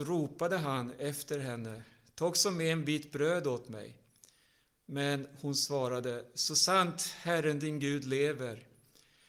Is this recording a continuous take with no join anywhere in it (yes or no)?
yes